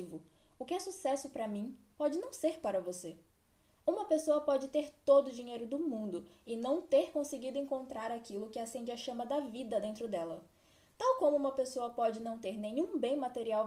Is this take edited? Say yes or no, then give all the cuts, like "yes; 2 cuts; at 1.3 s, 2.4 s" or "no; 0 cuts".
no; 0 cuts